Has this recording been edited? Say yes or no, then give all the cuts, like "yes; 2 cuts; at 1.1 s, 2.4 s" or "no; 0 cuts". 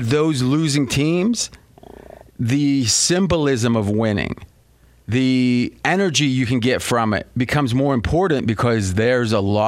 no; 0 cuts